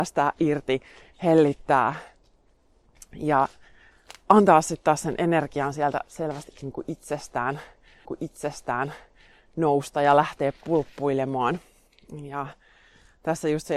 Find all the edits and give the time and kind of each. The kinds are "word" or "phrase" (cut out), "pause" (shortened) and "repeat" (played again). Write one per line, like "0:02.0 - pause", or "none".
0:08.0 - repeat

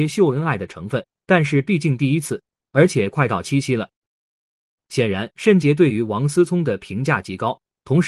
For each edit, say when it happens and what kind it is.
none

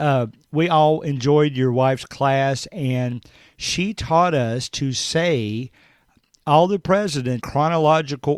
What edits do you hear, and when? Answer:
0:07.4 - word

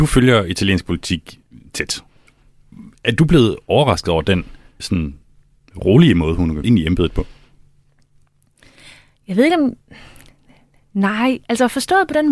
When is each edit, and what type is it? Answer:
0:04.8 - word
0:06.6 - word

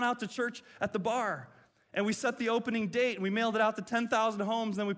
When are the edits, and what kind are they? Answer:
none

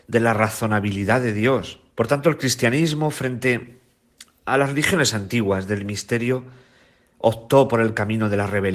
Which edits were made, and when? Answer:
0:01.9 - pause

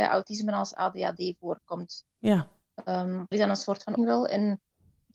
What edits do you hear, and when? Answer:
0:03.3 - word
0:04.0 - word

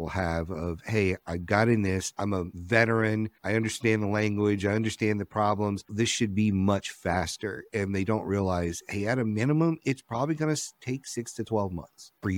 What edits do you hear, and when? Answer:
none

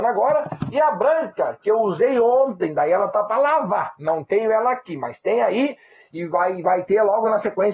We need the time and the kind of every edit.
none

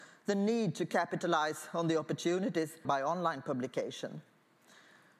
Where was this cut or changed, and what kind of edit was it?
0:02.8 - word

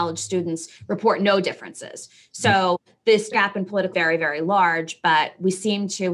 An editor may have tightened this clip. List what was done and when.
0:03.3 - word
0:03.9 - phrase

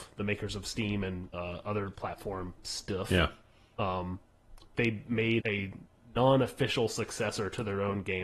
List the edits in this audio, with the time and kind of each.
0:01.3 - word
0:02.0 - word
0:04.7 - word
0:05.4 - word

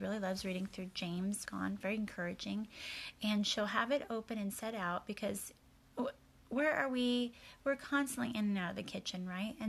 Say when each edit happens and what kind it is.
0:01.4 - phrase

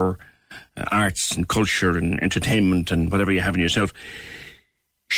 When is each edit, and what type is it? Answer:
none

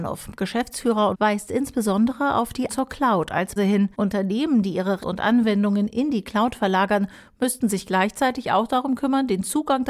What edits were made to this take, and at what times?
0:01.1 - phrase
0:02.7 - word
0:03.6 - word
0:03.9 - pause
0:05.0 - word

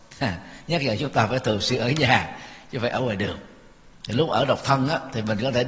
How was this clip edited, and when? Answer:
none

